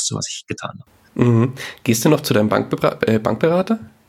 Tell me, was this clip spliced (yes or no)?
no